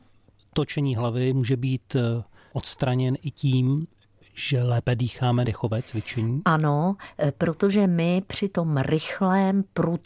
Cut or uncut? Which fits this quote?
cut